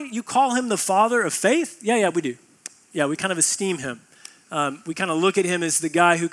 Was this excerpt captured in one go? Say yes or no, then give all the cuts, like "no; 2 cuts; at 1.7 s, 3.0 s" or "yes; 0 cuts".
yes; 0 cuts